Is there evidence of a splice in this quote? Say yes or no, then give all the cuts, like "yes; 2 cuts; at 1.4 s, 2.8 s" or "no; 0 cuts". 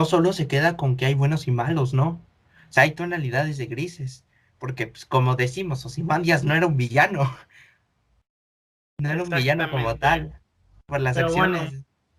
no; 0 cuts